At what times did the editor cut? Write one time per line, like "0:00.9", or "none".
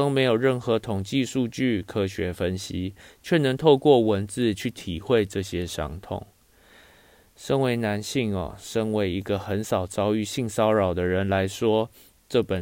none